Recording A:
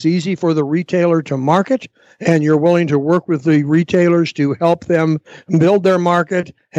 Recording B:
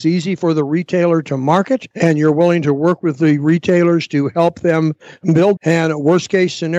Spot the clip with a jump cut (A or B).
B